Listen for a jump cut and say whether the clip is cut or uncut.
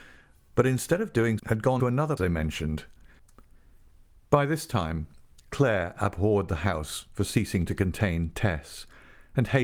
cut